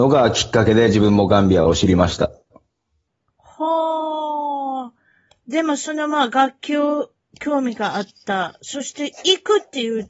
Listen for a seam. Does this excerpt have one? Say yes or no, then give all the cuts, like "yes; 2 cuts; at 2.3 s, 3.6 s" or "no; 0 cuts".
no; 0 cuts